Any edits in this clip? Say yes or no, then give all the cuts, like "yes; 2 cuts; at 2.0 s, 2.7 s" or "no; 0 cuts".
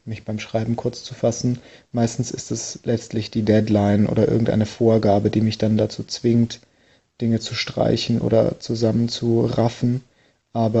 no; 0 cuts